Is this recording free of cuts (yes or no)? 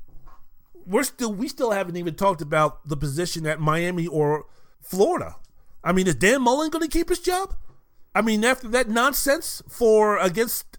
no